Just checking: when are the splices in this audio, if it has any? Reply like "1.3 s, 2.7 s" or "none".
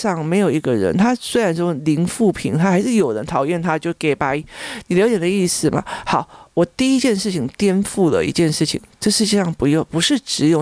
none

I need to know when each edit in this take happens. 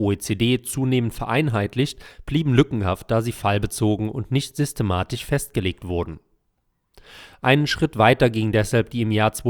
none

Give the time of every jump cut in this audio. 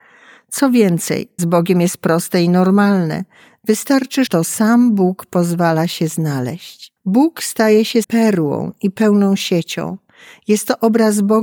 1.4 s, 4.3 s, 7.0 s, 8.0 s

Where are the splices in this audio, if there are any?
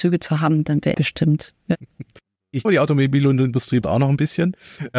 0.9 s, 2.6 s, 3.8 s

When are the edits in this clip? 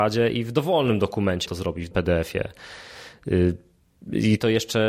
1.5 s, 1.9 s

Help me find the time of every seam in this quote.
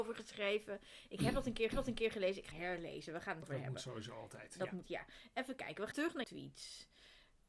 1.7 s, 2.5 s, 3.4 s, 4.8 s, 5.9 s, 6.2 s

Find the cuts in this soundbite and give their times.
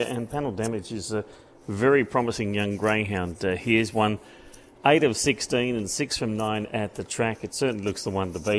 none

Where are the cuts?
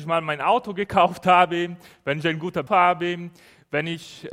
2.7 s

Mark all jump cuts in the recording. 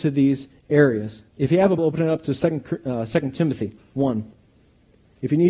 1.3 s, 1.8 s

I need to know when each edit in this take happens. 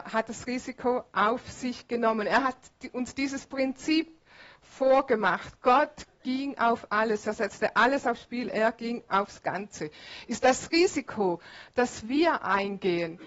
none

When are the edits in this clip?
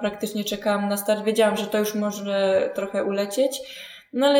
none

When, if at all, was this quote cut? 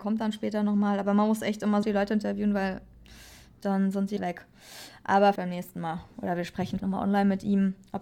1.8 s, 4.2 s, 5.4 s, 6.8 s

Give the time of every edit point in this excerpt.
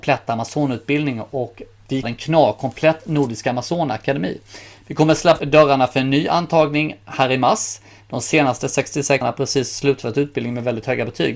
2.0 s, 5.4 s, 9.2 s

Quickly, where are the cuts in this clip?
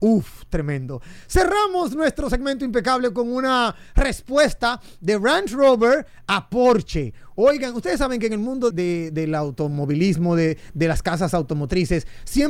8.7 s

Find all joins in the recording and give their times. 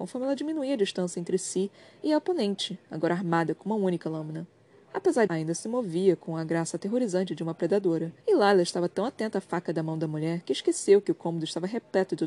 5.3 s, 8.2 s

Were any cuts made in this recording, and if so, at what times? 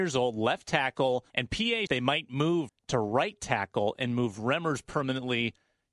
1.3 s, 1.9 s, 2.7 s

